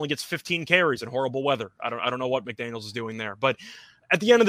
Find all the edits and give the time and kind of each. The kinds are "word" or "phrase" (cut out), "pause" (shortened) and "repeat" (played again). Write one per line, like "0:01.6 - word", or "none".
none